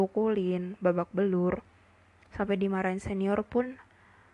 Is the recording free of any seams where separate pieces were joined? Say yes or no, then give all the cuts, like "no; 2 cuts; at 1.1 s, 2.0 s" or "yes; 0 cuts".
yes; 0 cuts